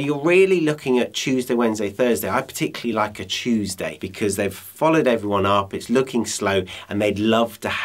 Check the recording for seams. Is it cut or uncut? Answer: uncut